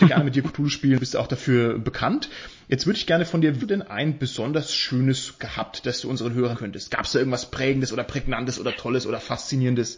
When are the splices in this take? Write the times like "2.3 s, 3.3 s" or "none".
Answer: 3.6 s, 5.4 s, 6.5 s